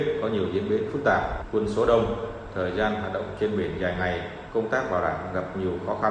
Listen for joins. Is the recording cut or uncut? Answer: uncut